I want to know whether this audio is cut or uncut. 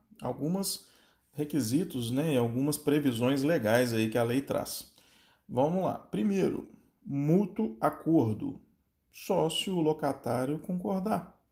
uncut